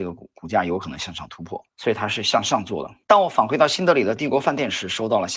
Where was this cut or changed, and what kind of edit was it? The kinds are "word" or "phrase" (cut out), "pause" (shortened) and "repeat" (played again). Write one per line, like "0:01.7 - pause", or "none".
0:01.7 - pause
0:03.0 - pause